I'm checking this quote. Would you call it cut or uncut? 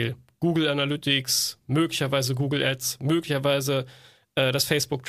uncut